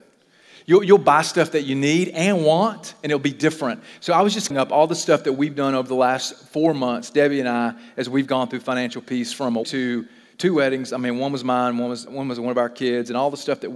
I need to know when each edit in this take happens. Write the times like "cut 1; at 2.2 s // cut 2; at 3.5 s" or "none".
cut 1; at 4.5 s // cut 2; at 9.6 s // cut 3; at 12.1 s